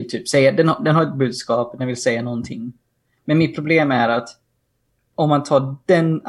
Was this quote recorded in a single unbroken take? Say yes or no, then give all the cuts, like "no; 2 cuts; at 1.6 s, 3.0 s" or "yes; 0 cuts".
yes; 0 cuts